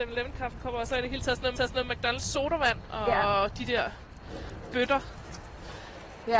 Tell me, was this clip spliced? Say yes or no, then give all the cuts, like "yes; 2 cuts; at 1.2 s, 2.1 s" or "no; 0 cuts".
yes; 1 cut; at 1.6 s